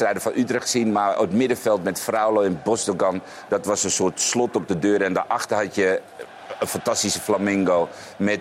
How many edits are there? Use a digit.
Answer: 0